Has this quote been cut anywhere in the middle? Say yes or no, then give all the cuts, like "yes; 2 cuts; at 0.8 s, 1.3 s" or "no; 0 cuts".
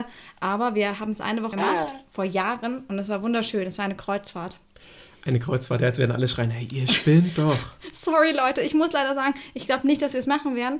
yes; 1 cut; at 1.5 s